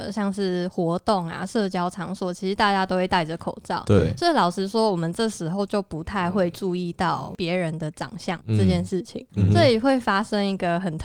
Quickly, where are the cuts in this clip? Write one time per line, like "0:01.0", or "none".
none